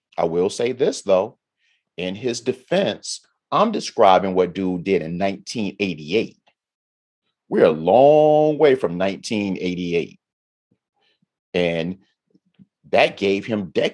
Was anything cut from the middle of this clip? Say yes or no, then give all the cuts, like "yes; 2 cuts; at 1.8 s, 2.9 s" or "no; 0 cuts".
no; 0 cuts